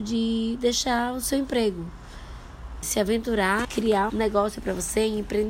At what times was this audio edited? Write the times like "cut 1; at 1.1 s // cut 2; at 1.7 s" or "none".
cut 1; at 2.8 s // cut 2; at 3.6 s // cut 3; at 4.1 s